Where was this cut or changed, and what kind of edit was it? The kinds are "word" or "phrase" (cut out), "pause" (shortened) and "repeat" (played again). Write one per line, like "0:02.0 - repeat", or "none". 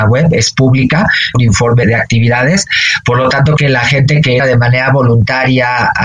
0:01.3 - phrase
0:01.8 - word
0:03.6 - word
0:04.4 - word

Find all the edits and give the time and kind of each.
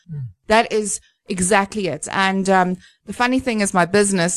none

